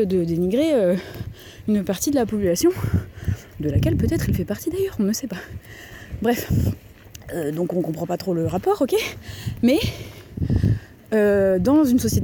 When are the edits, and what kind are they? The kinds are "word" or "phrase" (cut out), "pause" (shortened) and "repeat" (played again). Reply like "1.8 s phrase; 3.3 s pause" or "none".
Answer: none